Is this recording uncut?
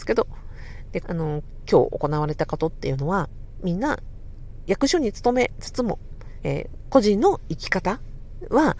no; 2 cuts; at 1.0 s, 6.4 s

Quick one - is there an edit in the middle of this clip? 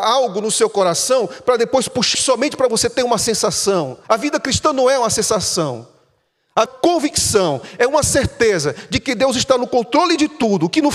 yes; 3 cuts; at 2.1 s, 4.0 s, 6.7 s

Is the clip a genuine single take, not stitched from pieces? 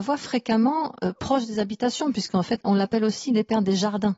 yes; 0 cuts

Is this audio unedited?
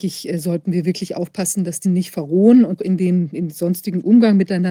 no; 2 cuts; at 1.8 s, 2.8 s

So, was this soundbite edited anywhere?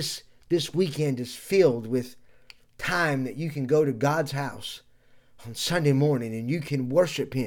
no; 0 cuts

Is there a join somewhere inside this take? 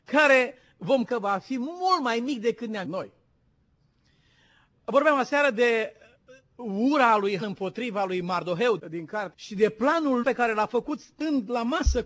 yes; 6 cuts; at 1.0 s, 2.8 s, 7.4 s, 8.8 s, 9.3 s, 10.2 s

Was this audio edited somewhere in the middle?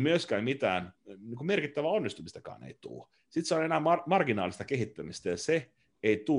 yes; 1 cut; at 1.0 s

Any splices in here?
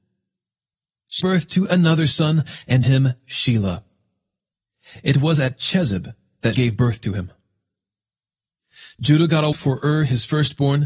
yes; 4 cuts; at 1.2 s, 2.8 s, 6.5 s, 9.5 s

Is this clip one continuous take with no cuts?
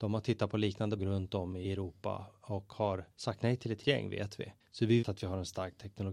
no; 6 cuts; at 1.0 s, 1.6 s, 3.1 s, 3.8 s, 4.6 s, 5.0 s

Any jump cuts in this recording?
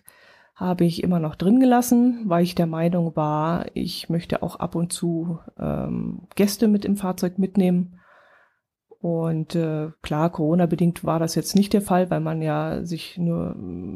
no; 0 cuts

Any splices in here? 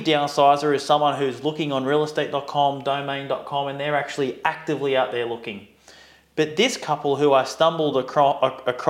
no; 0 cuts

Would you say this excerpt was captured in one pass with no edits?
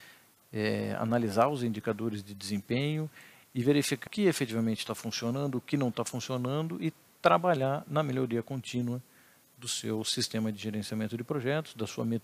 no; 1 cut; at 4.1 s

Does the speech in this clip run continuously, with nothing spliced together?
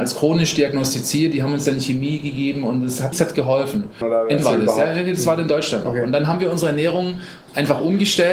no; 3 cuts; at 3.1 s, 4.0 s, 4.4 s

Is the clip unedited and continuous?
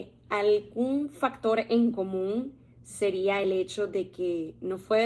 yes; 0 cuts

